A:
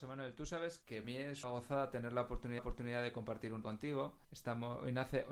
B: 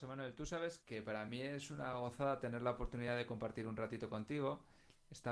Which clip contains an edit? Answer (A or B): A